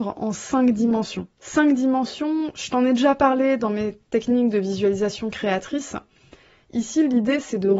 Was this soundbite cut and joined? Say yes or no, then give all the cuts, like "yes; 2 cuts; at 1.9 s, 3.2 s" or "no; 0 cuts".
yes; 2 cuts; at 1.3 s, 4.0 s